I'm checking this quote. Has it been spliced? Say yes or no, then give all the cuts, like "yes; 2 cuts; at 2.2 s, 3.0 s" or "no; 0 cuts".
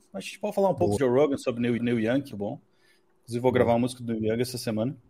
yes; 3 cuts; at 1.0 s, 1.8 s, 2.3 s